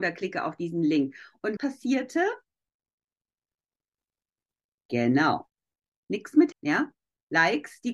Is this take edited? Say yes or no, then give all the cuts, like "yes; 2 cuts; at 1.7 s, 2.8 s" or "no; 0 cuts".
yes; 2 cuts; at 1.6 s, 6.5 s